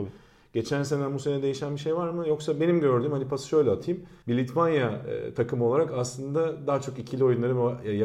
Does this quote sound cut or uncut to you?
cut